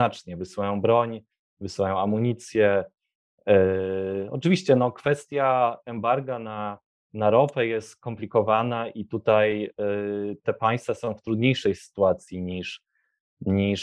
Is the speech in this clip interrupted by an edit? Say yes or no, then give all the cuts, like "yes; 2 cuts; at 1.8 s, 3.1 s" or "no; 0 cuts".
no; 0 cuts